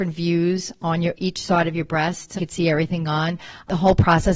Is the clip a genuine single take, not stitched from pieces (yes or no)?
no